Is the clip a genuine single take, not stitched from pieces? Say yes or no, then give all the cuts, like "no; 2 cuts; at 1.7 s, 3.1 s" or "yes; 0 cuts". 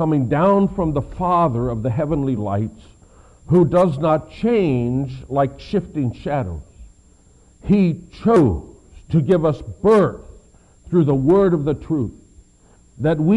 yes; 0 cuts